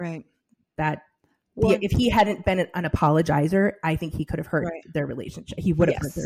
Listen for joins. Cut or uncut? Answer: uncut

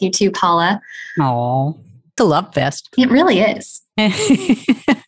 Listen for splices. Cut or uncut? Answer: cut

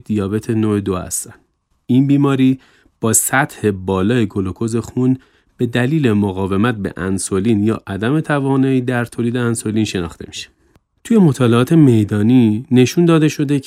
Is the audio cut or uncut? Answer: uncut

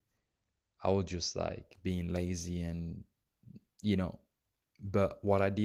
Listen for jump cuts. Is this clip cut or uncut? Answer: uncut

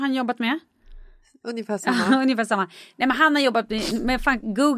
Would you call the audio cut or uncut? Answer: uncut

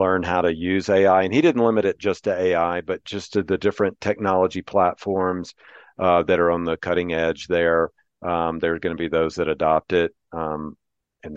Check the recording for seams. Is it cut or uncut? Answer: uncut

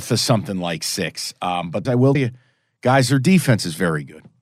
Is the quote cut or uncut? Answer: cut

